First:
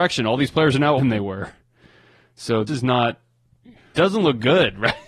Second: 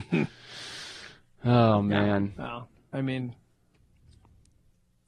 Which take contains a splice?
first; 3 cuts; at 1.0 s, 2.7 s, 3.9 s

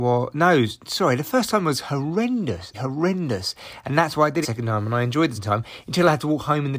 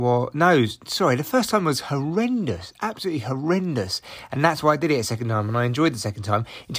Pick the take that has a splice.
first; 3 cuts; at 2.7 s, 4.4 s, 5.3 s

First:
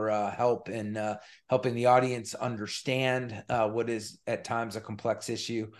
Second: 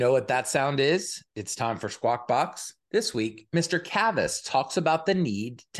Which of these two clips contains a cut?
second; 1 cut; at 2.8 s

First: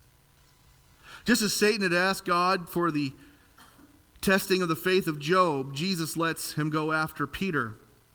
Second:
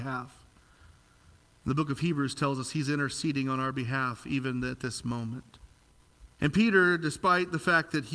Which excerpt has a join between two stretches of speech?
second; 1 cut; at 6.3 s

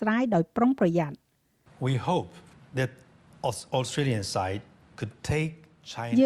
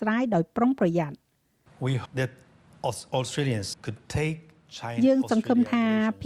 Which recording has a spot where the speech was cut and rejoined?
second; 2 cuts; at 2.0 s, 3.7 s

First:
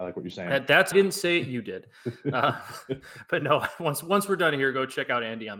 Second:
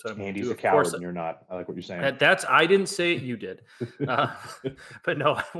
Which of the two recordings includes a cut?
first; 1 cut; at 0.9 s

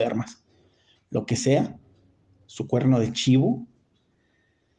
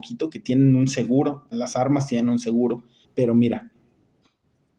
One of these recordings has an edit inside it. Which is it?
second; 2 cuts; at 1.5 s, 3.0 s

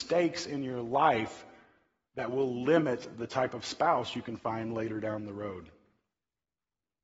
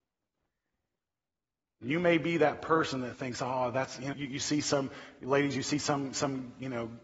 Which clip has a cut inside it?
second; 1 cut; at 4.1 s

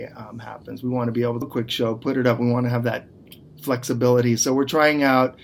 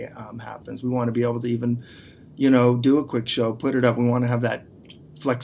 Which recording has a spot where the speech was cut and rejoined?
first; 1 cut; at 1.4 s

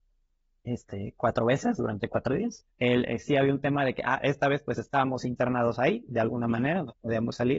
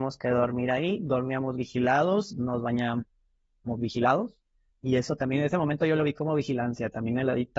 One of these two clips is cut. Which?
first; 1 cut; at 2.7 s

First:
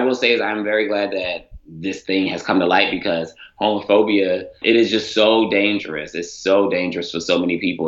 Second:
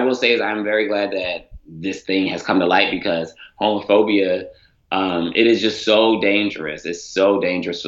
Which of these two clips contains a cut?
first; 1 cut; at 4.6 s

